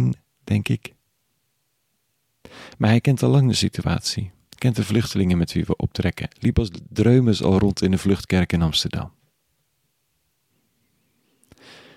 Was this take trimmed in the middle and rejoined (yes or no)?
no